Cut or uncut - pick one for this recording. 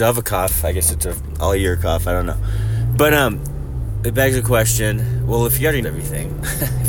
cut